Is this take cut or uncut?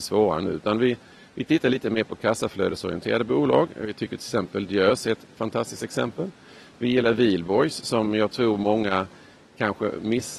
uncut